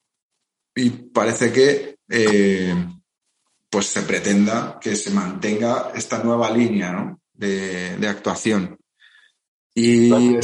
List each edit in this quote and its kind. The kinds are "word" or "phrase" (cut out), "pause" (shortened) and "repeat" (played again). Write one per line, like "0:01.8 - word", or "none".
none